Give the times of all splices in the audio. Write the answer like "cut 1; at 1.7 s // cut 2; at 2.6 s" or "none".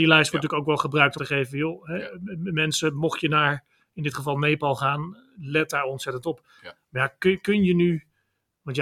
cut 1; at 1.2 s